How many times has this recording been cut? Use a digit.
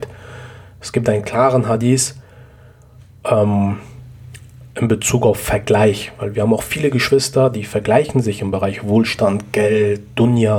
0